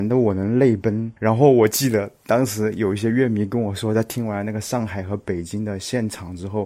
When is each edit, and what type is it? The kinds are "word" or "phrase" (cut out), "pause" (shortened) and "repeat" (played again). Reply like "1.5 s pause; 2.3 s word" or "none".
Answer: 1.2 s pause